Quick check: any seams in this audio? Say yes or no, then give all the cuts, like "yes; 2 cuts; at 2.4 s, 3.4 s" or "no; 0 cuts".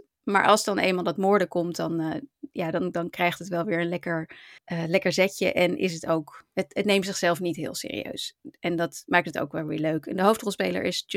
yes; 1 cut; at 4.6 s